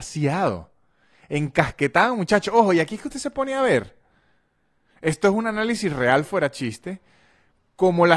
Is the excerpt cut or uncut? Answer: uncut